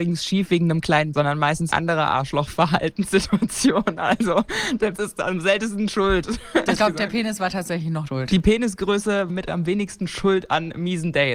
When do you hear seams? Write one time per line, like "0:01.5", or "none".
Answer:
0:01.1
0:01.7
0:04.9
0:06.7
0:08.1
0:09.3